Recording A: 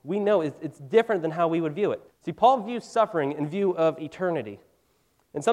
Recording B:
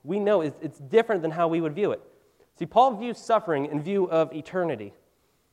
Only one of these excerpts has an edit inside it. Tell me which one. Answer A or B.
A